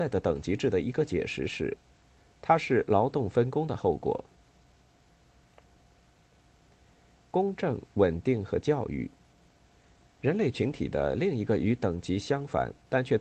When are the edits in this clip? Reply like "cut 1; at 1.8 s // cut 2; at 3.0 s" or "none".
none